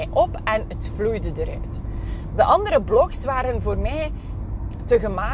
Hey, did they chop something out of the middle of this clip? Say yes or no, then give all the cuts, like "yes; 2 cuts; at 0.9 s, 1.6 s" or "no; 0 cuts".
no; 0 cuts